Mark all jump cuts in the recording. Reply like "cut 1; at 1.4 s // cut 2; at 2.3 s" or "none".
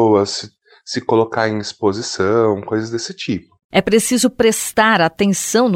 cut 1; at 3.6 s